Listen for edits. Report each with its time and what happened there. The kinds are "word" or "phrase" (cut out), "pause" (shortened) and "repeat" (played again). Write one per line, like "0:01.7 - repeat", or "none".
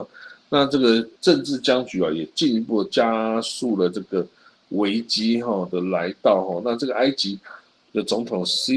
0:01.2 - pause

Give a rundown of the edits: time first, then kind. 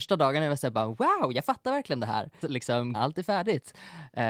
0:02.4 - word
0:02.9 - word

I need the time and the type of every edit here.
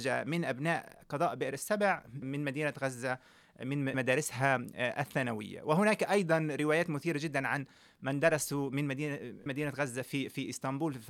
0:02.2 - word
0:03.9 - word
0:09.5 - word

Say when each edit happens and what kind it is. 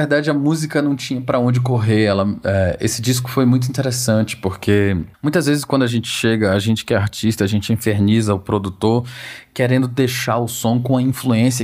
0:05.1 - pause

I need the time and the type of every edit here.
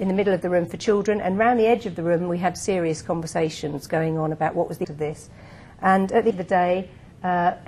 0:04.8 - word
0:06.3 - word

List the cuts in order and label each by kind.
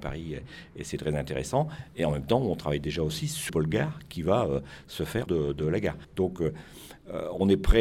0:03.5 - word
0:05.3 - word
0:06.0 - pause

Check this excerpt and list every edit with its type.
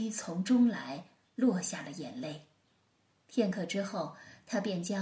none

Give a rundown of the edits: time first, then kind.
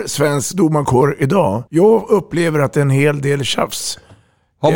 0:01.7 - pause

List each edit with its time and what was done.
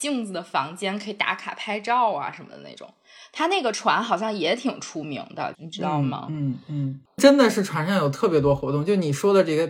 0:05.5 - phrase

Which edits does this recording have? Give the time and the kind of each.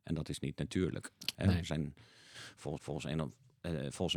0:01.3 - pause
0:02.8 - repeat

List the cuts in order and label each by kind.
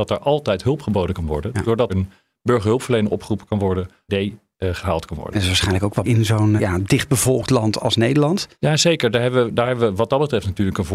0:01.9 - word
0:04.1 - phrase
0:06.0 - word
0:06.6 - phrase
0:07.8 - word
0:08.5 - pause

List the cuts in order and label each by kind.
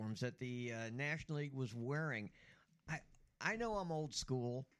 none

